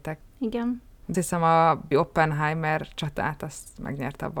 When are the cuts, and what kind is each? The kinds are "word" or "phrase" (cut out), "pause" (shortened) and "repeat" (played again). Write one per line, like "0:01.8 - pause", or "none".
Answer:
0:01.1 - word
0:01.9 - word